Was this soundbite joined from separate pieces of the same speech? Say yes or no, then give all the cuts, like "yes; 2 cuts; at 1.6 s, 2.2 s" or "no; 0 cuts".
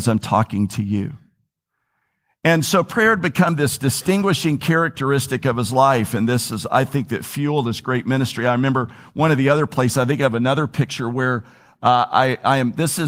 no; 0 cuts